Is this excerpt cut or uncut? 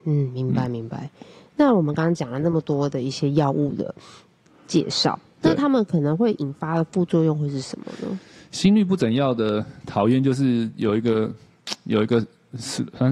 uncut